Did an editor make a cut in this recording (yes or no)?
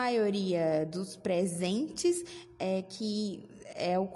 no